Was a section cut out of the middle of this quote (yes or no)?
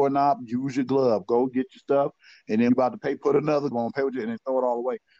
yes